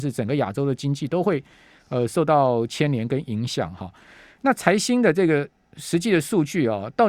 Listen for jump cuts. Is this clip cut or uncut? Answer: uncut